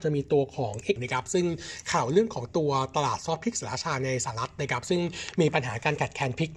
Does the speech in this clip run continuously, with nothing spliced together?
no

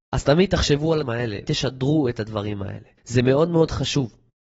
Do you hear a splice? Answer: yes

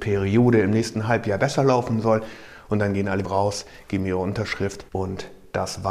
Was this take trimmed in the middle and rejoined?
yes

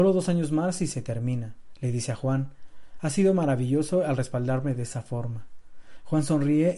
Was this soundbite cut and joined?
no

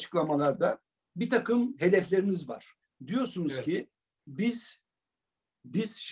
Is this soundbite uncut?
no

